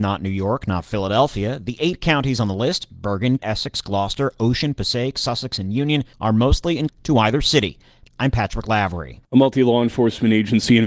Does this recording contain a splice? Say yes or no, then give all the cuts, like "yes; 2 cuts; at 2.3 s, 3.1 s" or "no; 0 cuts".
yes; 4 cuts; at 3.4 s, 6.1 s, 6.9 s, 8.1 s